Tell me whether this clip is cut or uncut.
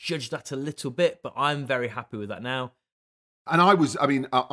uncut